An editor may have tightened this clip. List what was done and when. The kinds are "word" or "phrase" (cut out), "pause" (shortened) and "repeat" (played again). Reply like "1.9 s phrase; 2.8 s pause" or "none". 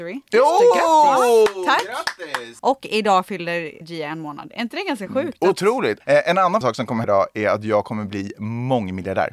3.8 s word; 6.6 s word; 7.0 s word